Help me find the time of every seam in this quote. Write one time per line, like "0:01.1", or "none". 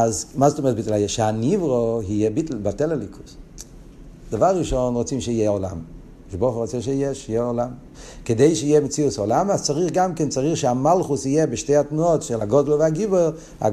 none